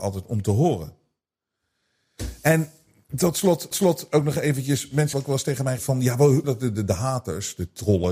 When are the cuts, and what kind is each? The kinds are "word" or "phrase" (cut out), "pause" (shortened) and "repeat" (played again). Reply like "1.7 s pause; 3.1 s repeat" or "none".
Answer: 3.7 s repeat; 5.1 s word; 5.8 s word; 6.4 s word